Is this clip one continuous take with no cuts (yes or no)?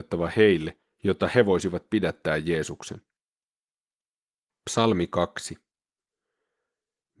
yes